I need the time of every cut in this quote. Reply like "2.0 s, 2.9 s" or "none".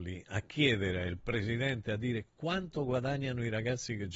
none